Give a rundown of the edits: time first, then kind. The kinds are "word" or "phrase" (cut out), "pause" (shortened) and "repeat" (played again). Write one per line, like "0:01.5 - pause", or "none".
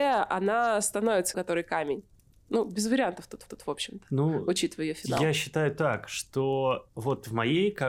0:01.3 - phrase
0:03.5 - repeat